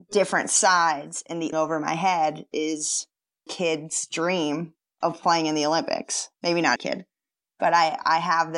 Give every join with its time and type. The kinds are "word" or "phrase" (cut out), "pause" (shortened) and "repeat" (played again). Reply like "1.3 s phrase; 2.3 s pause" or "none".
1.5 s phrase; 3.5 s word; 6.3 s pause; 6.8 s word